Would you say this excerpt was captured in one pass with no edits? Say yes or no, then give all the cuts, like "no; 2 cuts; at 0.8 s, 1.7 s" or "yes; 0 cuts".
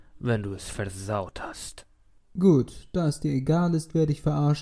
yes; 0 cuts